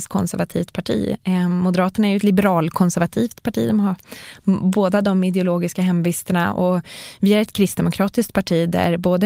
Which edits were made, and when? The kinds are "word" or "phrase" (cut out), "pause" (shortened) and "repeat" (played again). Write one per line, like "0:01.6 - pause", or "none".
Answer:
none